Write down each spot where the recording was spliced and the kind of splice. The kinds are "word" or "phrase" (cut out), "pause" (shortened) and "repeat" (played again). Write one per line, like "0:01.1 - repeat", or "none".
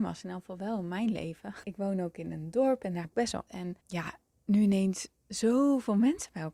0:01.6 - word
0:03.0 - phrase
0:03.5 - word
0:03.8 - pause